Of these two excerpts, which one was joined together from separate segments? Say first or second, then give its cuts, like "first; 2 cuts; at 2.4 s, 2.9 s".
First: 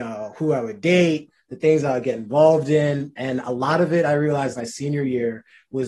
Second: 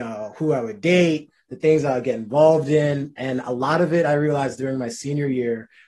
first; 1 cut; at 4.6 s